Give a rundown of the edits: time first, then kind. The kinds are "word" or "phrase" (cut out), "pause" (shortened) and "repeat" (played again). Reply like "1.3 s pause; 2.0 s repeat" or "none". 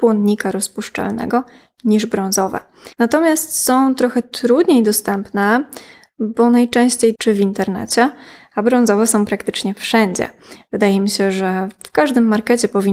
2.9 s pause; 7.2 s phrase